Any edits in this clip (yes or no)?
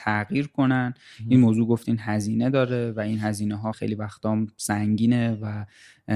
yes